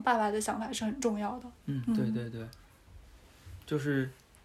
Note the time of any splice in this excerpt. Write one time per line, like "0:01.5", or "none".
0:01.6